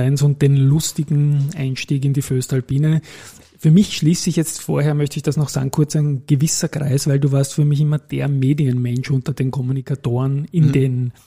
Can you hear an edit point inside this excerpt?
no; 0 cuts

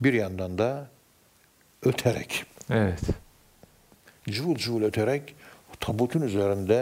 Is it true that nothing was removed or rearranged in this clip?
yes; 0 cuts

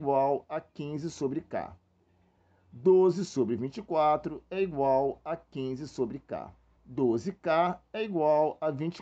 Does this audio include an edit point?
yes; 1 cut; at 6.8 s

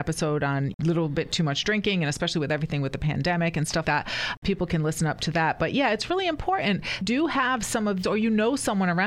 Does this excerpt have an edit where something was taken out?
yes; 3 cuts; at 3.8 s, 7.0 s, 8.0 s

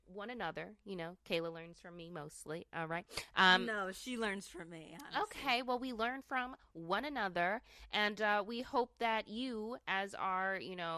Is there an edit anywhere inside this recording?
no; 0 cuts

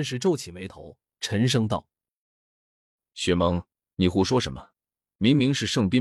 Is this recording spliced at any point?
no; 0 cuts

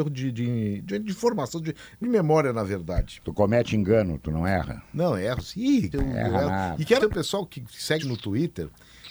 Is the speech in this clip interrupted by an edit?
yes; 4 cuts; at 2.0 s, 5.9 s, 7.0 s, 8.0 s

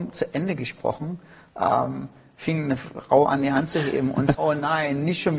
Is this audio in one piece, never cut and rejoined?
no; 1 cut; at 4.3 s

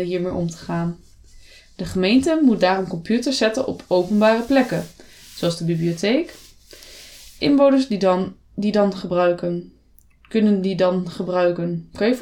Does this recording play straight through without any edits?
yes; 0 cuts

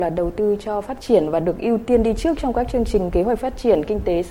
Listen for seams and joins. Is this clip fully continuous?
yes; 0 cuts

